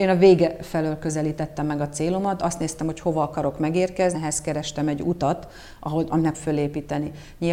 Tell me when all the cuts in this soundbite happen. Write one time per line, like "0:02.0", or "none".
0:04.1
0:06.3